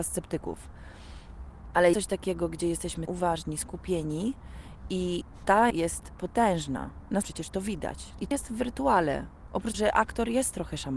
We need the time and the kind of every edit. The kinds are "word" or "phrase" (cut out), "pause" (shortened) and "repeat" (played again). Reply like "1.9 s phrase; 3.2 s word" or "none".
1.9 s word; 3.1 s word; 5.7 s word; 7.2 s word; 8.3 s word; 9.7 s word